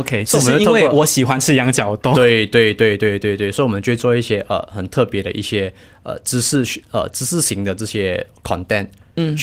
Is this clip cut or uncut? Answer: uncut